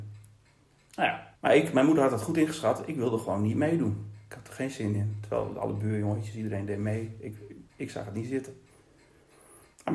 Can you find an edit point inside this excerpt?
yes; 2 cuts; at 1.3 s, 7.7 s

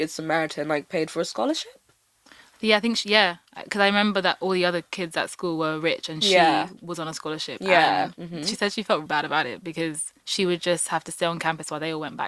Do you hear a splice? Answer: yes; 2 cuts; at 9.1 s, 10.2 s

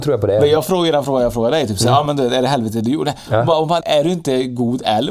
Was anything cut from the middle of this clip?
yes; 1 cut; at 3.8 s

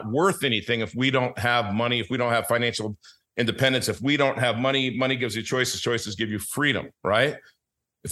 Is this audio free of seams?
yes; 0 cuts

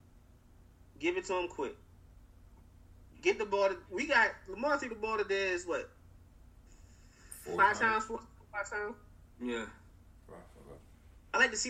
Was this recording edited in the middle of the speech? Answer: yes; 1 cut; at 3.9 s

